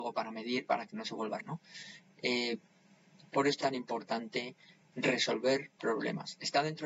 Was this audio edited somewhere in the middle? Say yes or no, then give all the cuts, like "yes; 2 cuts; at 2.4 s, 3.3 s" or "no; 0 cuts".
yes; 3 cuts; at 1.4 s, 3.6 s, 4.9 s